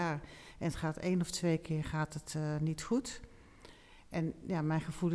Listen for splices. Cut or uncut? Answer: uncut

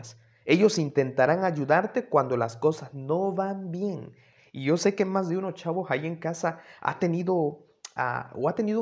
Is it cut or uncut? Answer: uncut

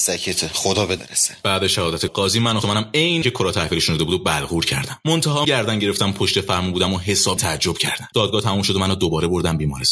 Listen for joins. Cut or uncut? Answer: cut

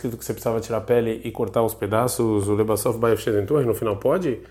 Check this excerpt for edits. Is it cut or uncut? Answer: uncut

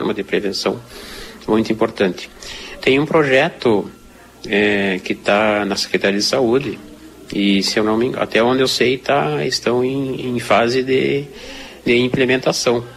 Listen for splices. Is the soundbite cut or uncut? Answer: uncut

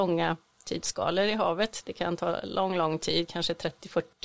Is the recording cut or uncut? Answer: uncut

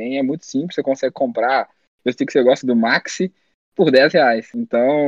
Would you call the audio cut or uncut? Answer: cut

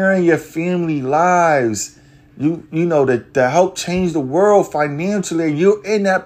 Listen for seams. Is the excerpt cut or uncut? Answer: uncut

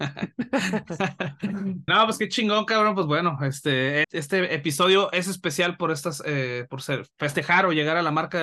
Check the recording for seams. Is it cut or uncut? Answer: cut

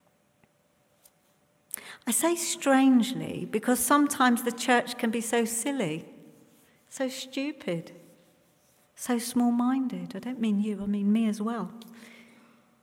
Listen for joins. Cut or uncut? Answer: uncut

